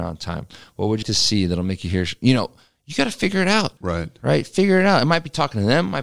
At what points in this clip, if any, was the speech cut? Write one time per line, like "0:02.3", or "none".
0:01.0
0:03.8